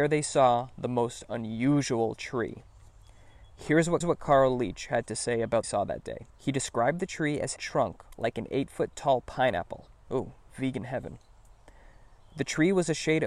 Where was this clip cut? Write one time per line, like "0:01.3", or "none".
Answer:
0:04.0
0:05.6
0:06.3
0:07.6